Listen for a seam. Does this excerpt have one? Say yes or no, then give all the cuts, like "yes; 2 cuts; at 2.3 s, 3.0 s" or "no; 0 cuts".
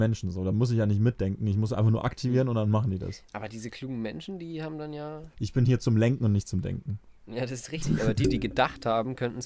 no; 0 cuts